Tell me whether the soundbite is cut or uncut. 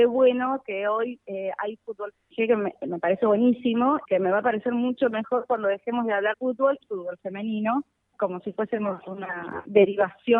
cut